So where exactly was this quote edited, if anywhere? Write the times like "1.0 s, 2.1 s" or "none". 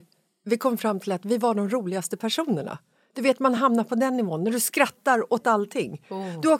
none